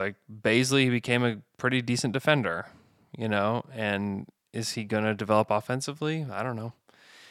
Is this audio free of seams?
yes; 0 cuts

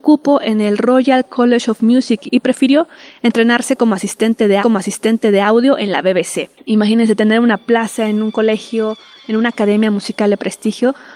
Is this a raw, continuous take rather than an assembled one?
no; 1 cut; at 4.6 s

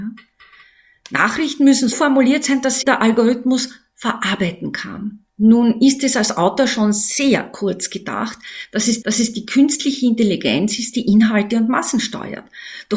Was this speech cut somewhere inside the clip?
yes; 4 cuts; at 1.9 s, 2.8 s, 5.3 s, 9.0 s

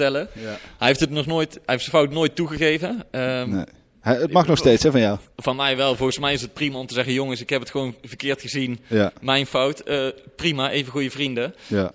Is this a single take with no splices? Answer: yes; 0 cuts

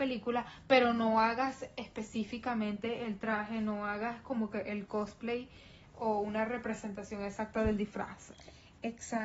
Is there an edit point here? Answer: no; 0 cuts

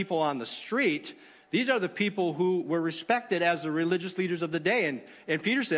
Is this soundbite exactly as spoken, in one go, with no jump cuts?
yes; 0 cuts

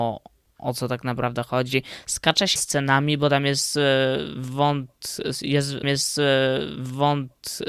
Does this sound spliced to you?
yes; 2 cuts; at 2.6 s, 5.8 s

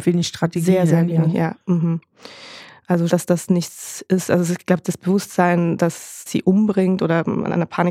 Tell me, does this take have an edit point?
yes; 2 cuts; at 3.1 s, 6.3 s

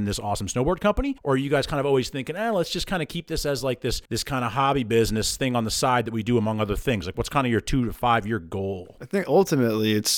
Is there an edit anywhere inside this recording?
yes; 2 cuts; at 1.2 s, 4.1 s

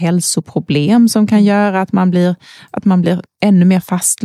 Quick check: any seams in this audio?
no; 0 cuts

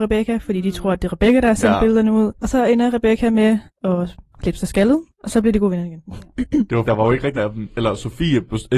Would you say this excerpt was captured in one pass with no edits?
no; 2 cuts; at 6.8 s, 7.3 s

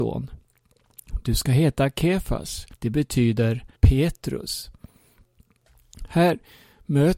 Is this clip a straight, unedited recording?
no; 2 cuts; at 2.7 s, 3.8 s

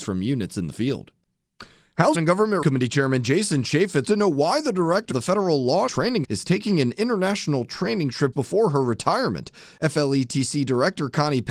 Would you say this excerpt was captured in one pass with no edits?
no; 7 cuts; at 2.1 s, 2.6 s, 4.0 s, 5.1 s, 5.9 s, 6.2 s, 8.3 s

